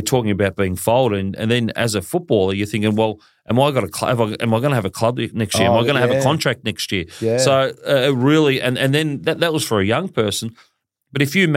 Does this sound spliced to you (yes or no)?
no